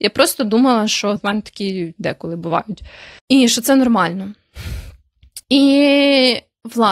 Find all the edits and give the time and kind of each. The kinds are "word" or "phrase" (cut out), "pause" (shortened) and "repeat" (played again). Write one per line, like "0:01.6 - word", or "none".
0:01.2 - word
0:02.0 - word
0:03.2 - pause
0:05.4 - pause

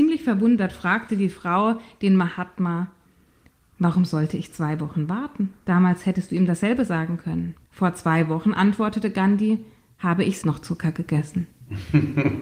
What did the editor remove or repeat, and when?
0:05.6 - pause
0:07.6 - pause
0:10.4 - word

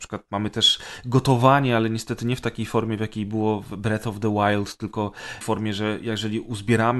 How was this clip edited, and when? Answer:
0:05.4 - phrase

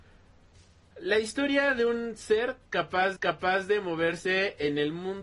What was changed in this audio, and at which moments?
0:03.2 - repeat

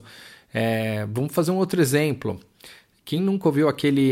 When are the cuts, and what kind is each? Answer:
none

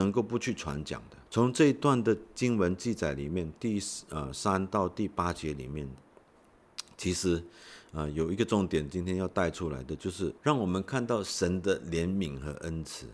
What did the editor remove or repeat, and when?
0:01.3 - pause
0:10.4 - pause

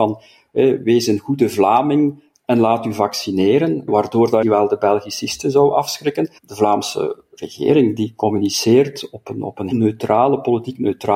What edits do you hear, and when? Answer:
0:03.9 - word
0:04.4 - phrase
0:06.4 - pause
0:09.7 - word

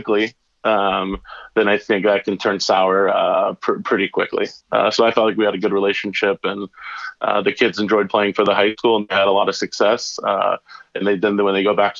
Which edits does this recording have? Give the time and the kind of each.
none

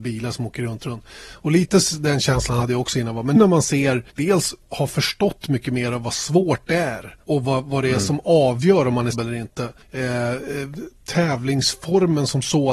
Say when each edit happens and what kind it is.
0:03.4 - word
0:04.1 - pause
0:07.2 - pause
0:09.1 - word
0:09.8 - pause

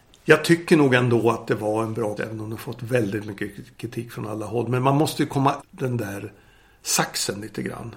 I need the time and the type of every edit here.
0:02.2 - word
0:05.6 - word

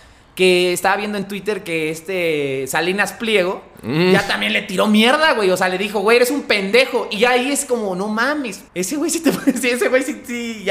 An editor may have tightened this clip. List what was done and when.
0:08.7 - pause

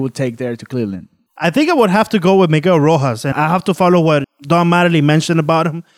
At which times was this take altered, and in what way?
0:03.3 - word
0:04.2 - word

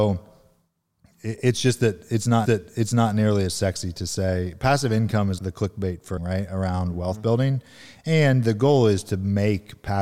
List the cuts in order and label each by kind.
0:02.4 - repeat
0:05.4 - word
0:06.2 - word

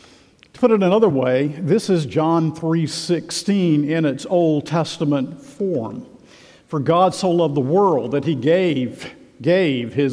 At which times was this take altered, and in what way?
none

